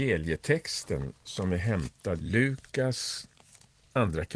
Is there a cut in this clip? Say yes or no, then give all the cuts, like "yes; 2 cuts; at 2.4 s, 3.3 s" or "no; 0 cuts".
yes; 1 cut; at 2.2 s